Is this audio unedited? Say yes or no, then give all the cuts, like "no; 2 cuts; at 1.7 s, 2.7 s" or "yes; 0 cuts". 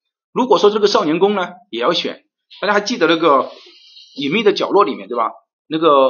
yes; 0 cuts